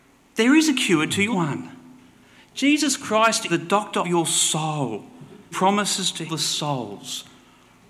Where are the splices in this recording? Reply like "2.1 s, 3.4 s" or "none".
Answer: 1.3 s, 3.5 s, 4.0 s, 5.5 s, 6.3 s

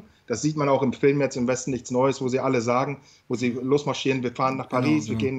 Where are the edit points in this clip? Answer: none

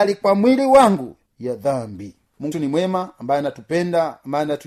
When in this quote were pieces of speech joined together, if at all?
1.3 s, 2.5 s

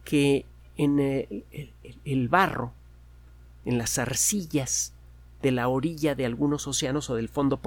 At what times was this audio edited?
none

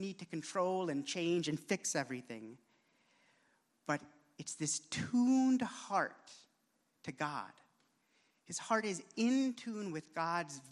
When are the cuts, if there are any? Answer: none

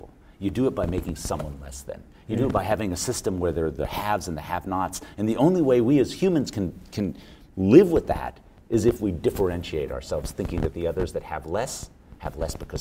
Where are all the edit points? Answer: none

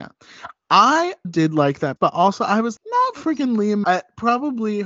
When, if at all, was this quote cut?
1.2 s, 2.0 s, 2.8 s, 3.8 s

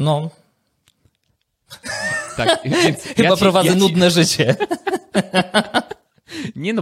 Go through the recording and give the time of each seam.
none

